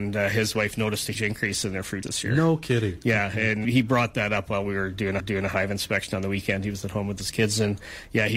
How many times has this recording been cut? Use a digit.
4